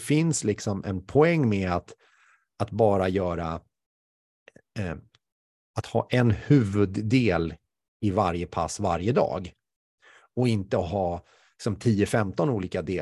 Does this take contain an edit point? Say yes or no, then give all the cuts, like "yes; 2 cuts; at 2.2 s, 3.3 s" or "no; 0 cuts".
no; 0 cuts